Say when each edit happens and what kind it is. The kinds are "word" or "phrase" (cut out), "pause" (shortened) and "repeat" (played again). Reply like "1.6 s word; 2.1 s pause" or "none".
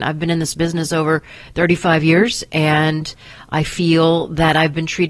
none